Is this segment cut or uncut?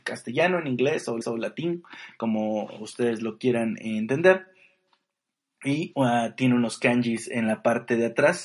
cut